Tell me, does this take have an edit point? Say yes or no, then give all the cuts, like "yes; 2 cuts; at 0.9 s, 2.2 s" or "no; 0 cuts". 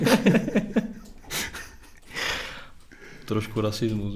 no; 0 cuts